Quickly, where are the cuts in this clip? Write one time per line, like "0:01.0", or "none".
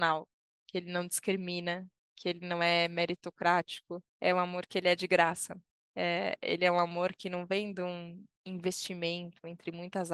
0:04.1
0:05.7